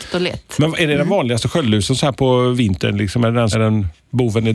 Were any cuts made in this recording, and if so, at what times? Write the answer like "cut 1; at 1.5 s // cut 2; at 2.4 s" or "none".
cut 1; at 3.5 s